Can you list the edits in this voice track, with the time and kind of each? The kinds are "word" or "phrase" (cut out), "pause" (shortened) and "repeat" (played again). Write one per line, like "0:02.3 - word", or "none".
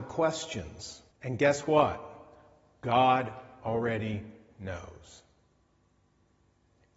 0:01.1 - pause